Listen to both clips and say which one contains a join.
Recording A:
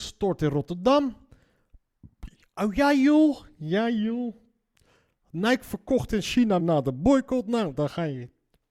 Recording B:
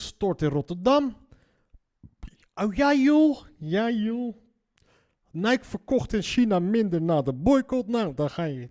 A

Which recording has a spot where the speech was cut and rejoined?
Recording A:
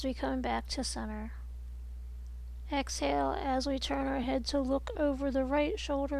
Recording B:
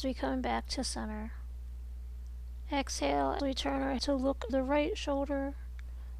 B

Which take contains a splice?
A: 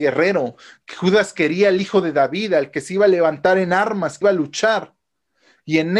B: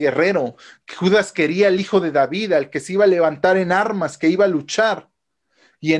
A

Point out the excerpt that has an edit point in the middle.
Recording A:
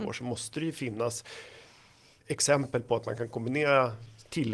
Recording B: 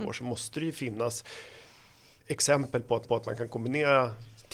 B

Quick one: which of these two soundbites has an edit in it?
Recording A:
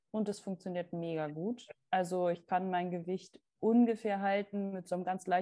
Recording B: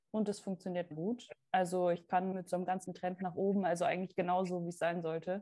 B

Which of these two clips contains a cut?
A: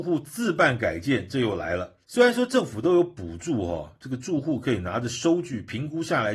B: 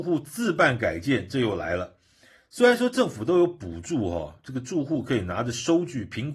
A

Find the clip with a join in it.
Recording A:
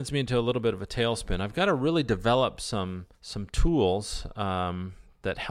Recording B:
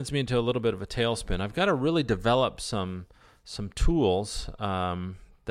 A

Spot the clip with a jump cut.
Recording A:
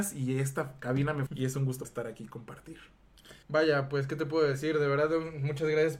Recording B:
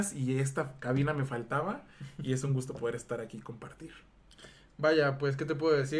A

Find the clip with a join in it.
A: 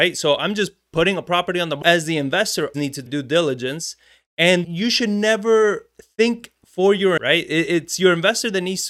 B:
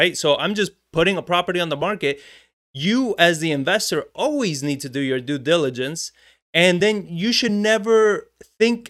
A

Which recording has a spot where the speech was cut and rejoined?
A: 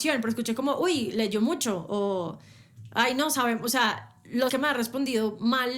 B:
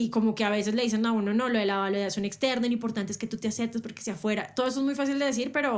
A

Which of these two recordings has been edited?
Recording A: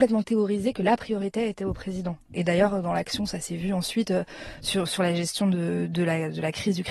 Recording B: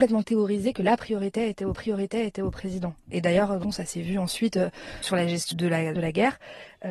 B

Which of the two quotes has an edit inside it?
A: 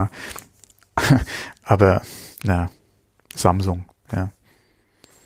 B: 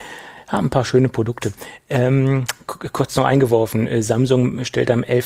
A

